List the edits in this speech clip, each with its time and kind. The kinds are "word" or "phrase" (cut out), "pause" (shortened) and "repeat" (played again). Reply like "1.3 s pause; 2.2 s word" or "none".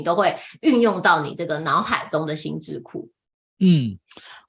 3.4 s pause